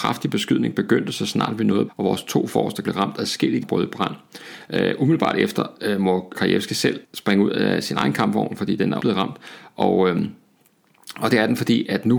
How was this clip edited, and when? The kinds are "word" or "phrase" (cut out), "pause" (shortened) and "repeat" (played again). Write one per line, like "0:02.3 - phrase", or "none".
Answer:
0:01.9 - word
0:02.8 - word
0:03.6 - word
0:06.3 - word
0:07.0 - pause
0:09.0 - word